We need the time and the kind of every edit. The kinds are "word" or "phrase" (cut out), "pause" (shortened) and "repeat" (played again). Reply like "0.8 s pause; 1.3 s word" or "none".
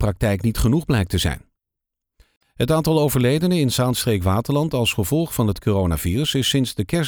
none

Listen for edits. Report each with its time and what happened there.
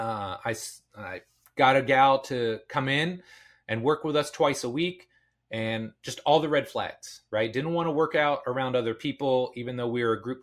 none

